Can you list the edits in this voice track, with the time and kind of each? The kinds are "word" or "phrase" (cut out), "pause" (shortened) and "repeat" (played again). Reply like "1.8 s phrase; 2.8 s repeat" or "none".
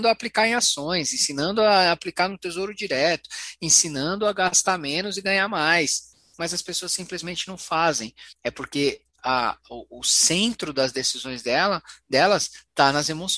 8.3 s pause